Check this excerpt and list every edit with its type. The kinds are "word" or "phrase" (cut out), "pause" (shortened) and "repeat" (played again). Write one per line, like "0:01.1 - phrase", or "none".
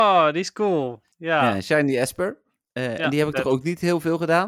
none